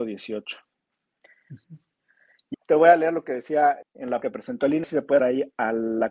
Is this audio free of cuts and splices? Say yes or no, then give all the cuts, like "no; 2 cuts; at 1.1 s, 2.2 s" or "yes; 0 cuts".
no; 5 cuts; at 2.5 s, 3.8 s, 4.2 s, 4.8 s, 5.2 s